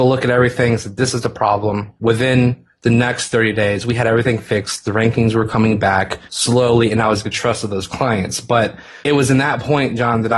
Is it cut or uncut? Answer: cut